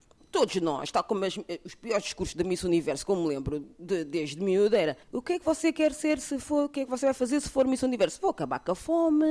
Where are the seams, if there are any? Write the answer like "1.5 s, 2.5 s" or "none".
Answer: 5.0 s